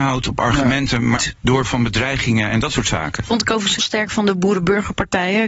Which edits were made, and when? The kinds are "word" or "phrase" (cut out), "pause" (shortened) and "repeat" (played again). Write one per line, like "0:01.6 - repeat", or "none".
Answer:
0:01.2 - word
0:01.6 - word
0:03.8 - word